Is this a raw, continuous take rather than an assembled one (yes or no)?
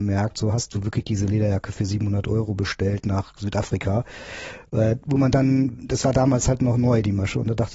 yes